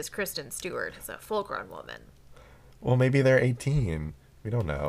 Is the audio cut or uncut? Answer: uncut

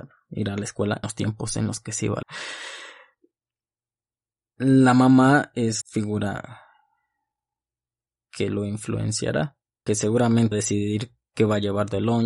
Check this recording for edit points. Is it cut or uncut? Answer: cut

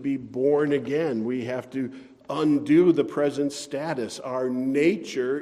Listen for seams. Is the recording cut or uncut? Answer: uncut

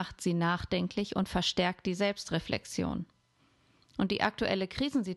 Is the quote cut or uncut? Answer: uncut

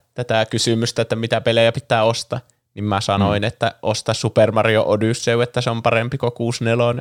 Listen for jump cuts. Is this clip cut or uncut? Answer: uncut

